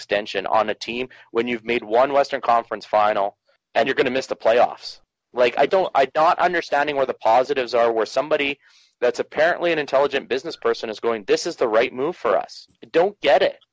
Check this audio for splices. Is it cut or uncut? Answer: cut